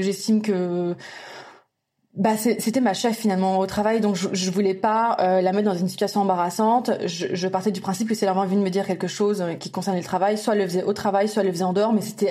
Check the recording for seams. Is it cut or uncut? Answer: uncut